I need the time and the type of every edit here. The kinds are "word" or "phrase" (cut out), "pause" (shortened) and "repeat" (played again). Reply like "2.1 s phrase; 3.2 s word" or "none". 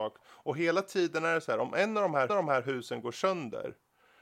2.3 s repeat